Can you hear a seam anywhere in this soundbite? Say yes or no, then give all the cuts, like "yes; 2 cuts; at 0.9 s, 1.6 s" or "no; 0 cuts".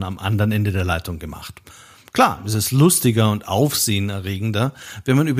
no; 0 cuts